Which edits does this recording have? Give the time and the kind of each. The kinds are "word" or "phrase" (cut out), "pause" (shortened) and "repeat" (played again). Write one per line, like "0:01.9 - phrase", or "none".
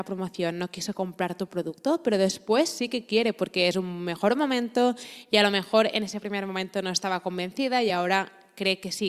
none